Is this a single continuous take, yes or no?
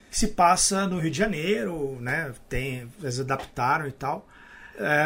yes